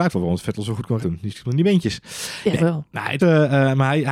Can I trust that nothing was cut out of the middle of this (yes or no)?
no